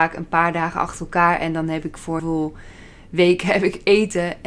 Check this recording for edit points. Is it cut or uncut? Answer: cut